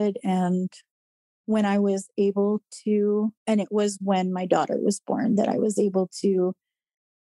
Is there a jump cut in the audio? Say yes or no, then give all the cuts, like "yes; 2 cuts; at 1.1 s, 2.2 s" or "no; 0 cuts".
yes; 1 cut; at 3.4 s